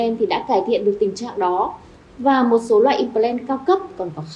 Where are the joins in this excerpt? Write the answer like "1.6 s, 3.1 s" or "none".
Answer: none